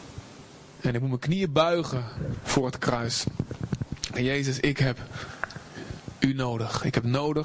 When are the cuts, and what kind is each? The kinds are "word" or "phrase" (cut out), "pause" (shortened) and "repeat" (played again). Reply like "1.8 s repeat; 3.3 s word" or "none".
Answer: 4.2 s word